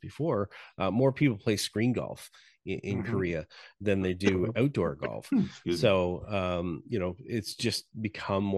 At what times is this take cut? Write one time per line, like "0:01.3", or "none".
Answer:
none